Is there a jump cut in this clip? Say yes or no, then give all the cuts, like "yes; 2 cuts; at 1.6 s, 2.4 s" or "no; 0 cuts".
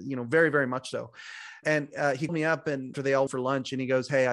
yes; 4 cuts; at 1.6 s, 2.3 s, 2.9 s, 3.3 s